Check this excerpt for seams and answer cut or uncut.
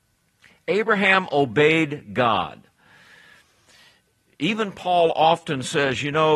uncut